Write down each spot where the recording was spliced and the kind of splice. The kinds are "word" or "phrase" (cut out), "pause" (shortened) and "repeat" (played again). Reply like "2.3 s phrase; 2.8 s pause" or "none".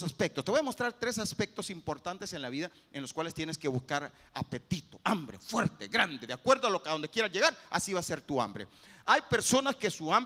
none

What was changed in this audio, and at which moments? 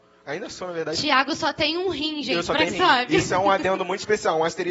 2.7 s word

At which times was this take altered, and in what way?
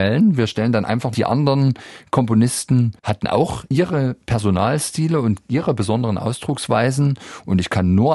1.1 s phrase

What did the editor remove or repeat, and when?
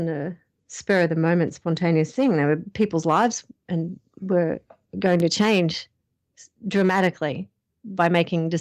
none

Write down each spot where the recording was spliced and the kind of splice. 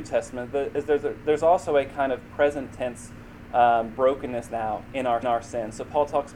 4.5 s phrase; 5.2 s repeat

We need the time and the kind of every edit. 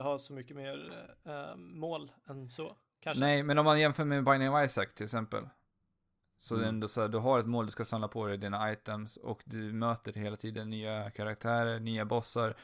none

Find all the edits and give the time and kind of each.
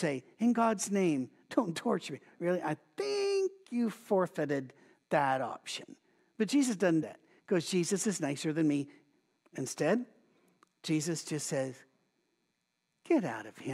2.3 s word; 7.0 s word

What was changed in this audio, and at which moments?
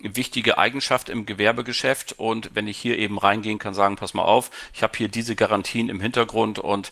3.6 s word

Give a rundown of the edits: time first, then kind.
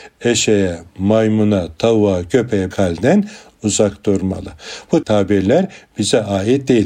2.7 s word; 5.0 s word

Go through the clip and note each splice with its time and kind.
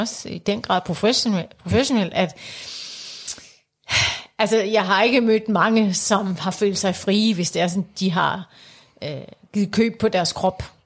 none

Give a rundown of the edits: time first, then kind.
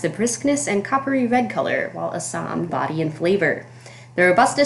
2.7 s phrase

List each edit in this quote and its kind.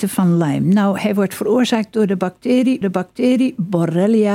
2.8 s repeat

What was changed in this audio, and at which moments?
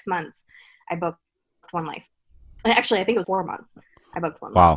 3.2 s word

